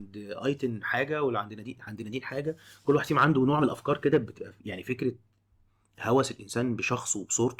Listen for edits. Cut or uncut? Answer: uncut